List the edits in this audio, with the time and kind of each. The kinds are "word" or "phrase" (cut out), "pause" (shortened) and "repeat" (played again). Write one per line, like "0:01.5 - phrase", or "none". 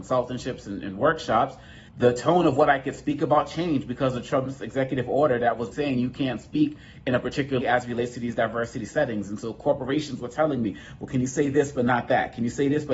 0:01.9 - pause
0:05.7 - word
0:07.6 - word